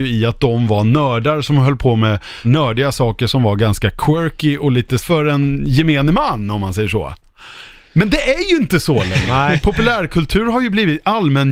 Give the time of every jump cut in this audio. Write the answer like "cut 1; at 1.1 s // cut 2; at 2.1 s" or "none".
cut 1; at 2.4 s // cut 2; at 5.0 s